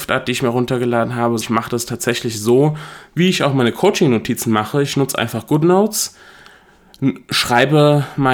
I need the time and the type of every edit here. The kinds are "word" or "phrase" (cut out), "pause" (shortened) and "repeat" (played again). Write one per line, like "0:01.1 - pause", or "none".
0:01.4 - word

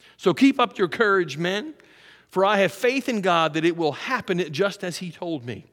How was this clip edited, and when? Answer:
none

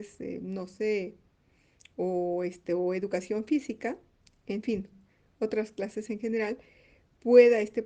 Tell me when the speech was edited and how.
none

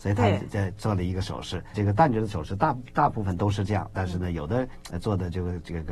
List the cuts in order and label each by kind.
0:01.7 - word

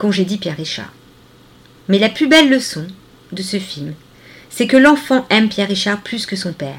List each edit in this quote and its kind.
none

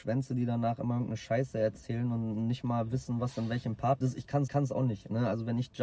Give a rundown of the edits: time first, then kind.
0:04.0 - word
0:04.5 - repeat

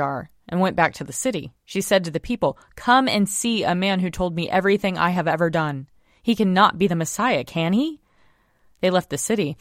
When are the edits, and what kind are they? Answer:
0:01.6 - pause

